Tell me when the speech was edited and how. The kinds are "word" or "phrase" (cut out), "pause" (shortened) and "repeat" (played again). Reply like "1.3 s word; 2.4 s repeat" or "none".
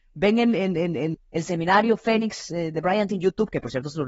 1.1 s word; 3.1 s word